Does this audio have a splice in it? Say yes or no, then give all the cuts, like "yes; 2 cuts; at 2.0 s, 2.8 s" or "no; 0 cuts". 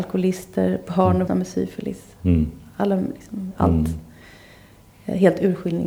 yes; 2 cuts; at 1.3 s, 3.5 s